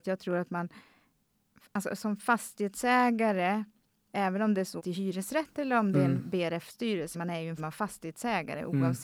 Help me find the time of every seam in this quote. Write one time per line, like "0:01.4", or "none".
0:04.8
0:07.1
0:07.6